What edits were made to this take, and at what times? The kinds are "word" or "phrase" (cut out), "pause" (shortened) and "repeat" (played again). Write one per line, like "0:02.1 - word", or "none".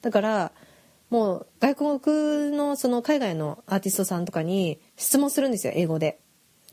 0:04.9 - pause